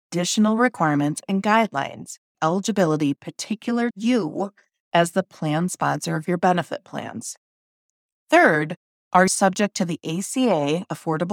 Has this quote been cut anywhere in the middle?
yes; 3 cuts; at 2.3 s, 3.9 s, 9.3 s

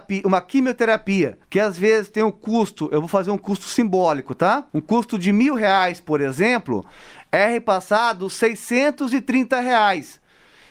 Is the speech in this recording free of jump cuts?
no; 2 cuts; at 1.4 s, 4.7 s

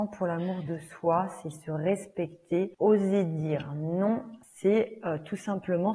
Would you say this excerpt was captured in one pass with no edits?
no; 2 cuts; at 2.7 s, 4.4 s

